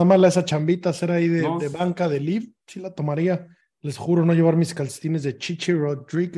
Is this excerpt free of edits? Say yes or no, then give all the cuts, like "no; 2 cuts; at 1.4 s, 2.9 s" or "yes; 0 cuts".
yes; 0 cuts